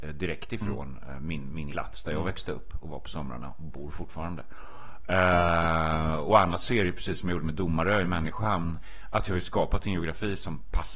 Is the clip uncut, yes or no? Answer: no